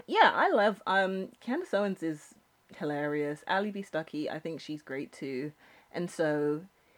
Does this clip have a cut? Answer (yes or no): no